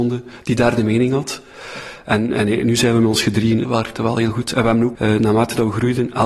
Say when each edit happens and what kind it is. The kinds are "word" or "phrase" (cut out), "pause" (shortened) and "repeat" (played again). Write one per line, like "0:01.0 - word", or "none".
0:03.6 - phrase
0:04.9 - phrase

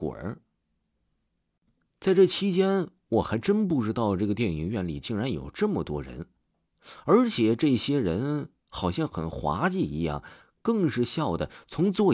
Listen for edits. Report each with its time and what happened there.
0:08.6 - pause

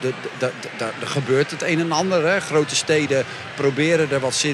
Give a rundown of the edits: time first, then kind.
none

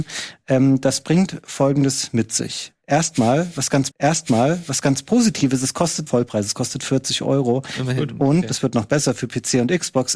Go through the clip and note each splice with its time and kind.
0:03.9 - repeat
0:06.1 - word

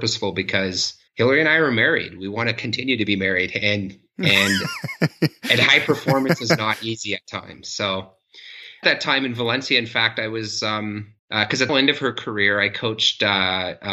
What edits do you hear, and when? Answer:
0:01.1 - pause
0:08.8 - phrase
0:11.2 - pause
0:11.7 - phrase

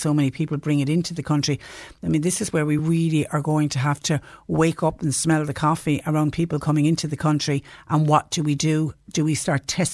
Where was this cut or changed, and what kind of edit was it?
none

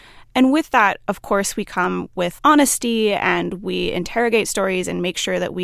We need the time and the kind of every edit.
0:02.4 - word

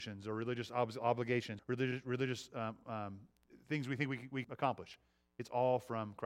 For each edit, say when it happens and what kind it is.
0:01.6 - word
0:04.4 - word

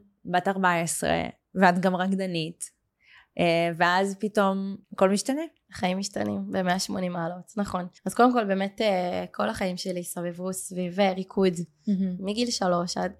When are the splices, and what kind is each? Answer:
0:04.8 - pause
0:08.0 - pause

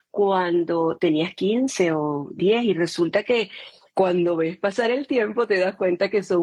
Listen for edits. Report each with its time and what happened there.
none

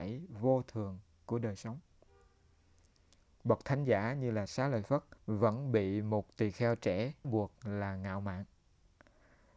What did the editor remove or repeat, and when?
0:05.2 - pause
0:07.2 - word

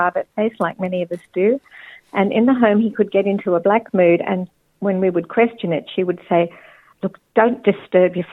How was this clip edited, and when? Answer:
none

